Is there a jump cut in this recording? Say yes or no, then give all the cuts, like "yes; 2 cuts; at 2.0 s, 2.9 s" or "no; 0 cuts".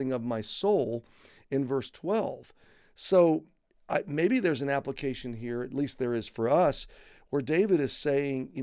no; 0 cuts